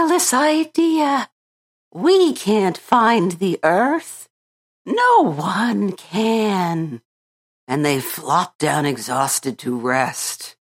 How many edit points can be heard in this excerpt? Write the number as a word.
zero